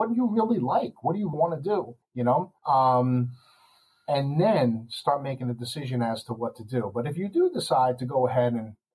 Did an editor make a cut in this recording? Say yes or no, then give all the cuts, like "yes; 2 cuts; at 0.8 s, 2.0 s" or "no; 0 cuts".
yes; 3 cuts; at 1.3 s, 2.0 s, 2.6 s